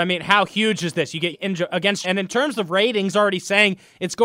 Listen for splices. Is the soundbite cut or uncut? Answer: cut